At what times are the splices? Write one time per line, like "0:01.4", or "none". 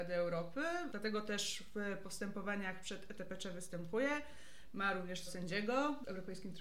0:05.3